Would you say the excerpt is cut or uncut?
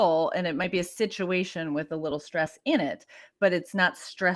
uncut